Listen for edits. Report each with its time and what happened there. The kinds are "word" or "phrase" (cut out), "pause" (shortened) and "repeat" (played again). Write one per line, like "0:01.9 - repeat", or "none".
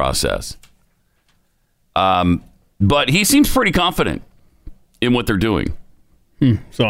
none